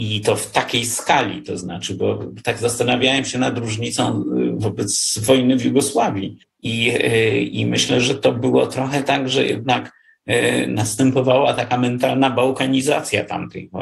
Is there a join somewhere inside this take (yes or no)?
yes